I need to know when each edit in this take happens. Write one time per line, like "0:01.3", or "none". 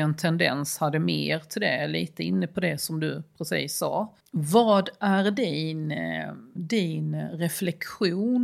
0:04.2